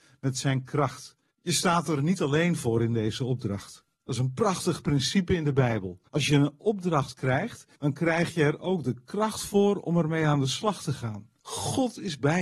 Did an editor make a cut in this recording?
yes; 5 cuts; at 1.3 s, 3.9 s, 6.1 s, 7.7 s, 11.4 s

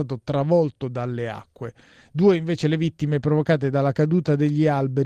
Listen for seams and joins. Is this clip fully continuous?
yes; 0 cuts

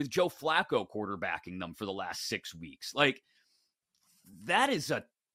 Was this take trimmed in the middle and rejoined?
no; 0 cuts

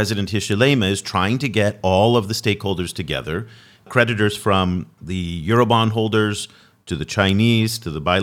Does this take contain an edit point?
no; 0 cuts

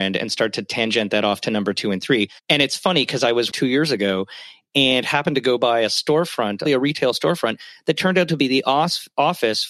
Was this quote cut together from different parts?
yes; 3 cuts; at 2.4 s, 3.5 s, 6.6 s

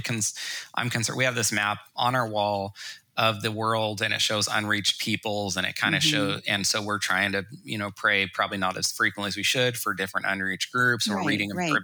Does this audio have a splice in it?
no; 0 cuts

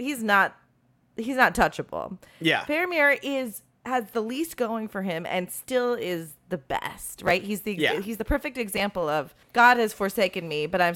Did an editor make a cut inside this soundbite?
yes; 2 cuts; at 3.8 s, 9.4 s

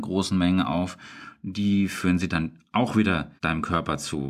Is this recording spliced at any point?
yes; 1 cut; at 3.4 s

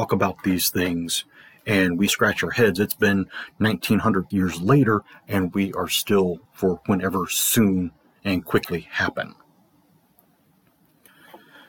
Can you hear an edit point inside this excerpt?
yes; 4 cuts; at 2.1 s, 2.8 s, 4.3 s, 6.5 s

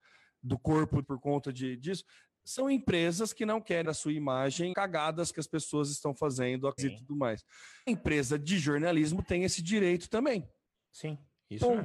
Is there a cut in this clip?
yes; 6 cuts; at 1.0 s, 3.8 s, 4.7 s, 5.3 s, 6.8 s, 7.9 s

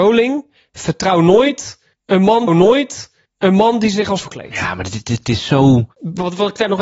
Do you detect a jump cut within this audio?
yes; 2 cuts; at 2.5 s, 4.2 s

